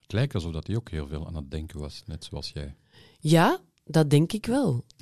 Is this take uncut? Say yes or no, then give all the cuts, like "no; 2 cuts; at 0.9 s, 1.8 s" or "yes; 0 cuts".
yes; 0 cuts